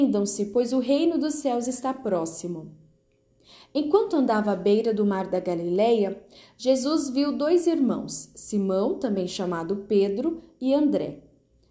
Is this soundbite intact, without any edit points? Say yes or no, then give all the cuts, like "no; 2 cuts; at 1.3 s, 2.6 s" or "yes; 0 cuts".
yes; 0 cuts